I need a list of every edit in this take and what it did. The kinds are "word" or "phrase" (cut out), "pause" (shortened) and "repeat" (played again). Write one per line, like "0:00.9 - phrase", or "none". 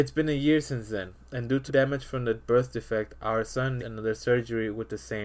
0:01.7 - word
0:03.8 - word